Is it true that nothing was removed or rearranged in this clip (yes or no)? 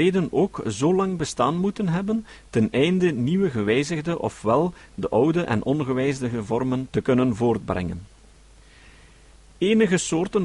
yes